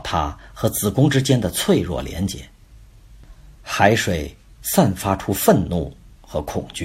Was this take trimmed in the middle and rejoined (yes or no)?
yes